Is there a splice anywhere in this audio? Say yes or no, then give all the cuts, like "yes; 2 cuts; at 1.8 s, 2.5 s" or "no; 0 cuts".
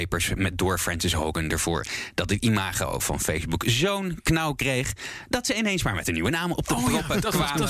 no; 0 cuts